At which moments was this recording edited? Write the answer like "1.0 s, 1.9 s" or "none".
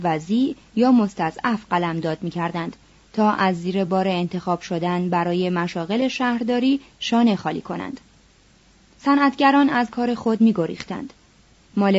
none